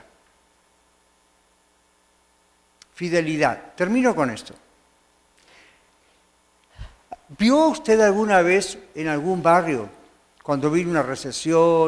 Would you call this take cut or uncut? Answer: uncut